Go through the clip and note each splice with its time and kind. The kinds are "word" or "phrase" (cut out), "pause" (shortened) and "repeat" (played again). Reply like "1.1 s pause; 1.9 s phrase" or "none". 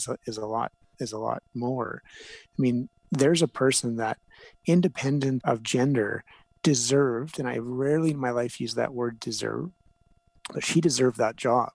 5.4 s word